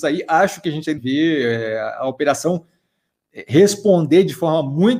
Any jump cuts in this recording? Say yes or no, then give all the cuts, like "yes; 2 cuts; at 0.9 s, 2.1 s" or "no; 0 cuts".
yes; 1 cut; at 1.0 s